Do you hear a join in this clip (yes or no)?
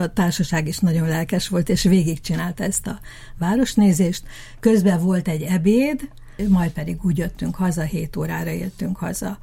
no